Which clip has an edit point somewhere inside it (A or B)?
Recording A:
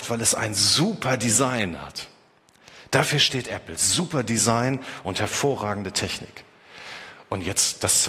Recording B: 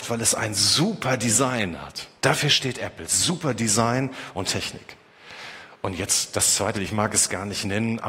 B